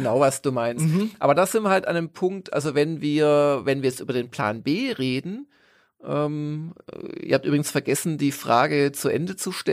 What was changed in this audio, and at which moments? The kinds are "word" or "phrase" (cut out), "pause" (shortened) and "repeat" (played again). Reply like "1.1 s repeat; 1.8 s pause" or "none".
none